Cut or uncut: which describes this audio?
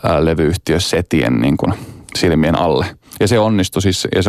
uncut